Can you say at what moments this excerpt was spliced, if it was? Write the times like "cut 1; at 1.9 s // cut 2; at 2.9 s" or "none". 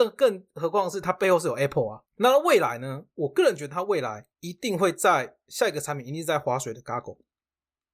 cut 1; at 2.1 s // cut 2; at 4.3 s